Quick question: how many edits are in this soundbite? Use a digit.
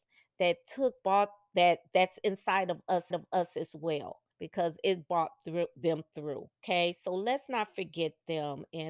4